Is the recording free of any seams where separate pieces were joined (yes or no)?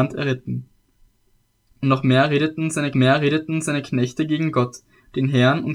no